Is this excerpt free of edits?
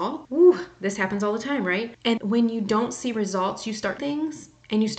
no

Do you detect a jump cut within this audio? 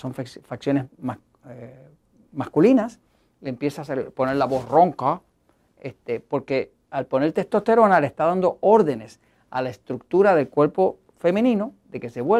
no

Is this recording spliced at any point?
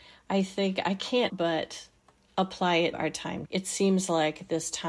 yes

